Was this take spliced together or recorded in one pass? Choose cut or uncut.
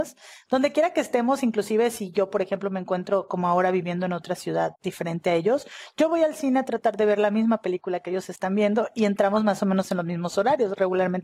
cut